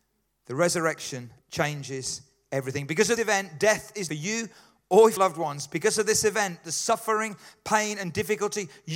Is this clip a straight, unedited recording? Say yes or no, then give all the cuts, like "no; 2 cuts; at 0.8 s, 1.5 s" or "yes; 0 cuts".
no; 4 cuts; at 1.4 s, 3.2 s, 4.1 s, 5.2 s